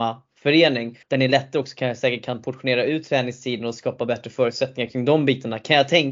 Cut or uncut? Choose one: cut